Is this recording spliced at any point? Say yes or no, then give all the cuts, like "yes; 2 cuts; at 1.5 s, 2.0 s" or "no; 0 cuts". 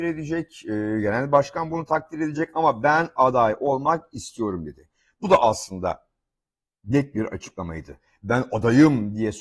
no; 0 cuts